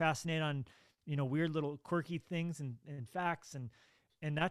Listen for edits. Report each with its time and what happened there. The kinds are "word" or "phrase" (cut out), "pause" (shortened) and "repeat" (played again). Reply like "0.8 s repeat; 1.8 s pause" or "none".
none